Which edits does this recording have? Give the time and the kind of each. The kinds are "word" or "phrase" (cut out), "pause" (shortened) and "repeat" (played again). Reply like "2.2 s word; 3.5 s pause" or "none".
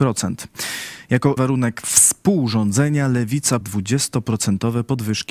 1.4 s word; 3.6 s word